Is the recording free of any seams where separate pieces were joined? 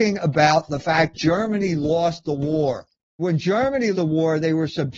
no; 3 cuts; at 1.1 s, 3.2 s, 3.9 s

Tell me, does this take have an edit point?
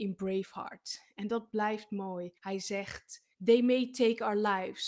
yes; 2 cuts; at 2.4 s, 3.3 s

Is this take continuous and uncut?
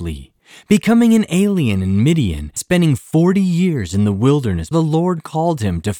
no; 2 cuts; at 2.6 s, 4.7 s

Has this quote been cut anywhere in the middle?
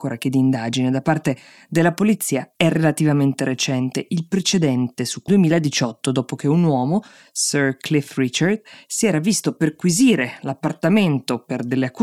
yes; 1 cut; at 5.3 s

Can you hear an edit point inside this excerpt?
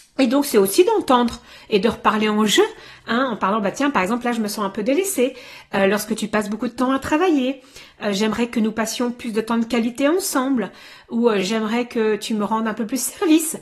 no; 0 cuts

